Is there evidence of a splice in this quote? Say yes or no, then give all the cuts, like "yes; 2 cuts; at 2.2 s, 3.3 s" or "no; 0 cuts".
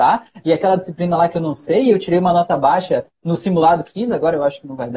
yes; 1 cut; at 3.8 s